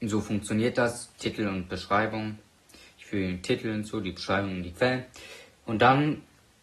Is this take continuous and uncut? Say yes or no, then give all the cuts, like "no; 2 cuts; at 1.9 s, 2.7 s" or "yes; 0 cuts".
yes; 0 cuts